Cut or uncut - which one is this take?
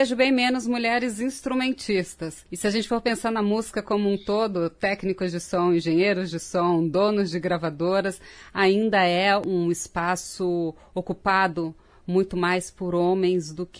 cut